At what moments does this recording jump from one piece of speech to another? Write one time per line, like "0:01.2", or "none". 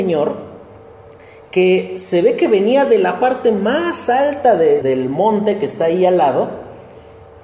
0:04.8